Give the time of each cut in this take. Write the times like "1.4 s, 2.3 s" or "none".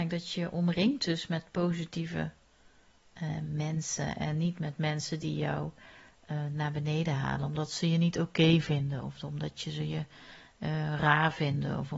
none